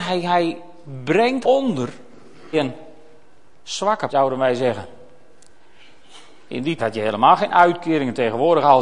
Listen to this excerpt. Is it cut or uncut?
cut